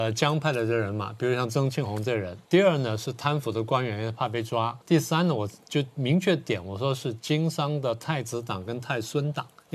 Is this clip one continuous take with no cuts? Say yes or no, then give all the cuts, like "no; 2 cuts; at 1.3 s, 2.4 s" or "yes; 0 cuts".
no; 2 cuts; at 2.4 s, 4.8 s